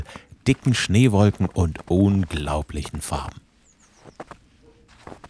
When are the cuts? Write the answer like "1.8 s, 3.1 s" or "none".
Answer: none